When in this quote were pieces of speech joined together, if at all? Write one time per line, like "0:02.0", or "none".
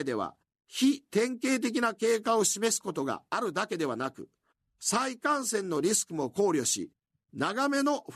none